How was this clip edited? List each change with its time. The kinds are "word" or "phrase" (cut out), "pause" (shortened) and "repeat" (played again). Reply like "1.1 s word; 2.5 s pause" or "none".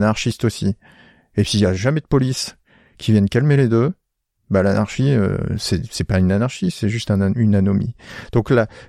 none

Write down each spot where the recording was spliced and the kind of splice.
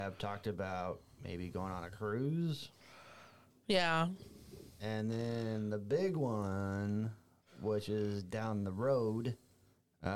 none

